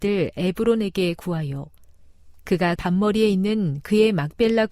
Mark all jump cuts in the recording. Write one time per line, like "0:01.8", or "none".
0:02.8

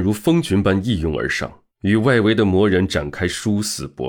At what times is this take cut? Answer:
0:01.7

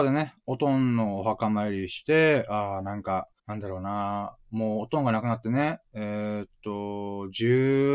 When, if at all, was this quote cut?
0:03.4

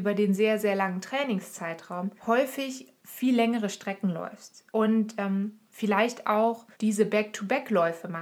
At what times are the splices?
0:02.2
0:04.7
0:05.7
0:06.7

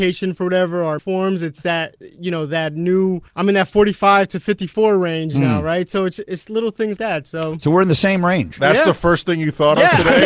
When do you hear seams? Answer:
0:01.0
0:03.3
0:07.0

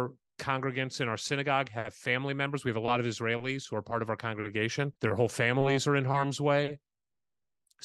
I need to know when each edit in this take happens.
0:05.0

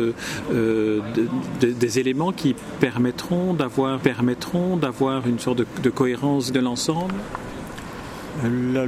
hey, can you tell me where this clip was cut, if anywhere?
0:04.0
0:06.5

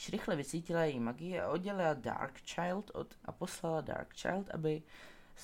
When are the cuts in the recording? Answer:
0:03.2

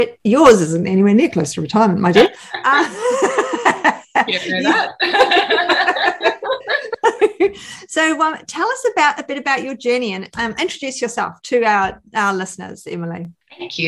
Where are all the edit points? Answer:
none

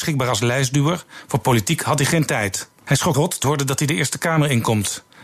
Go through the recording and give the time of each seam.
0:02.7
0:03.1
0:03.4

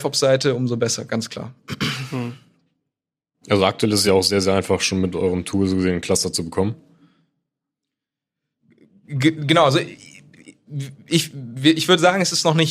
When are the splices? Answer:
none

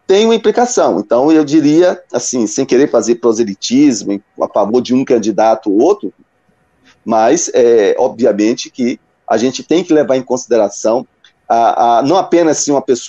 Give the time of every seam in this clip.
none

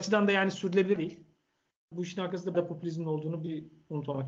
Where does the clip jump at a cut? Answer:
0:01.0
0:01.9
0:02.5

